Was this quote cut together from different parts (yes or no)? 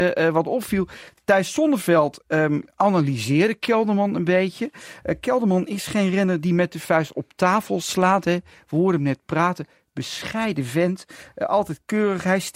no